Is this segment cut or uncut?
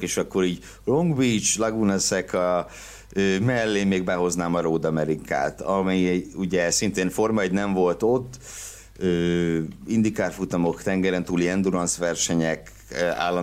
uncut